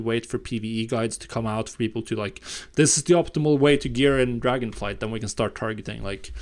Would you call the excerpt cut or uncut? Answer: uncut